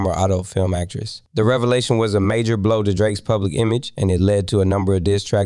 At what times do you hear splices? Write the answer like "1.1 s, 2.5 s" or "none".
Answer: 1.3 s

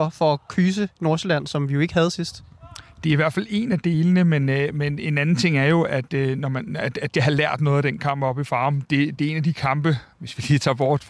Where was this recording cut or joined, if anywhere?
7.2 s, 9.2 s

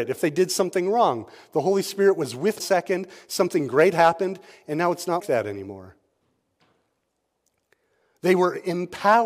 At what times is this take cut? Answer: 2.6 s, 5.2 s

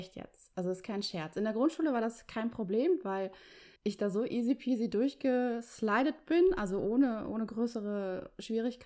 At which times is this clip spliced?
3.8 s

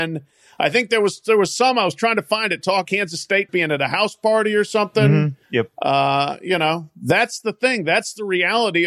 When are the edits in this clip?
2.8 s, 3.5 s, 5.4 s

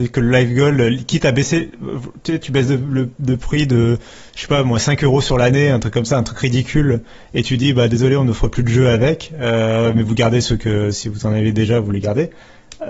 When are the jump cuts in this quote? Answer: none

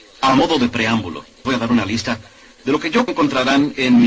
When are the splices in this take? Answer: 1.4 s, 3.1 s

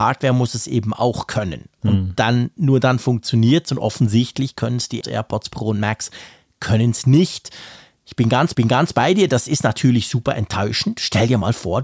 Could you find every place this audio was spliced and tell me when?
5.0 s, 8.5 s

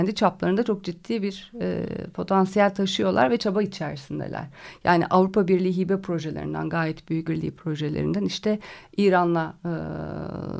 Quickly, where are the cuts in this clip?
7.2 s

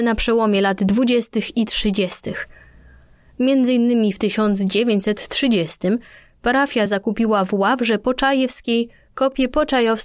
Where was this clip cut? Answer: none

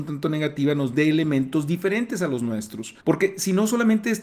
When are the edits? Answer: 3.0 s

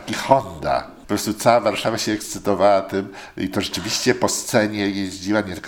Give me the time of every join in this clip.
none

